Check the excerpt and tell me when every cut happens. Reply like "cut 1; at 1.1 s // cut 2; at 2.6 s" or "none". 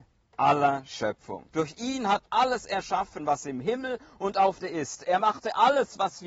cut 1; at 1.5 s // cut 2; at 2.3 s // cut 3; at 4.6 s